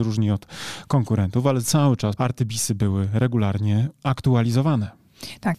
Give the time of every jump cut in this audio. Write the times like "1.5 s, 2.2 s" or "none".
1.6 s, 2.2 s